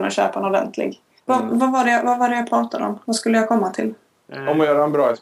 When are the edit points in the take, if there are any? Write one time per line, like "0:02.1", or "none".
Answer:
0:01.2